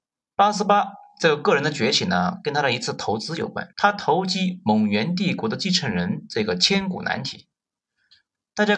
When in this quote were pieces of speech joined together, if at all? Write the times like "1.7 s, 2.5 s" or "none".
3.7 s